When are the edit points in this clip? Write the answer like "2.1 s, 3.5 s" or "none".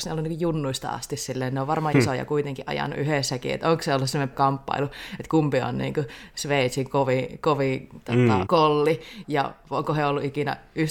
1.9 s, 4.3 s, 8.5 s, 9.2 s